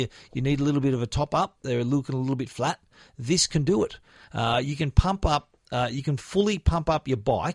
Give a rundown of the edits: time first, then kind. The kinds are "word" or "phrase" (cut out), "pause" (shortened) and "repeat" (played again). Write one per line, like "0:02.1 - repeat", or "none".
none